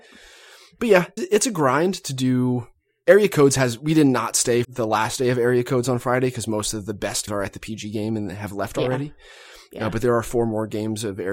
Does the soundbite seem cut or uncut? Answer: cut